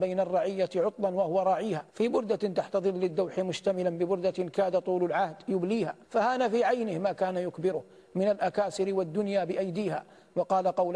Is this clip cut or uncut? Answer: cut